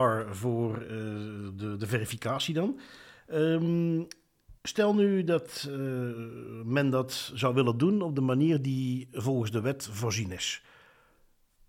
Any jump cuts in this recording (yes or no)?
yes